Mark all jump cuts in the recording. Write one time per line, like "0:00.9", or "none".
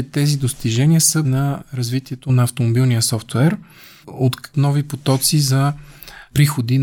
0:01.2
0:04.0
0:04.5